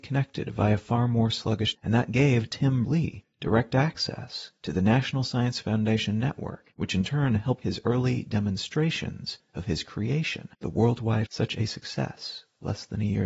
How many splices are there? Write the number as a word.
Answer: six